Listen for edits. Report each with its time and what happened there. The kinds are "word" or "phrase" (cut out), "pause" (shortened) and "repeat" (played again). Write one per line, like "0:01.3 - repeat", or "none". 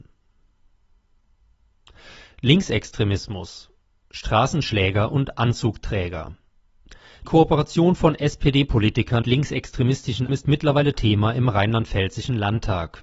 0:07.2 - word
0:09.2 - word
0:10.3 - word